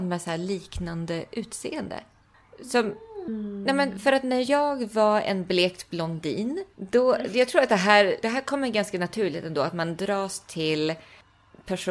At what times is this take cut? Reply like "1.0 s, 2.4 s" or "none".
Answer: 6.7 s, 8.2 s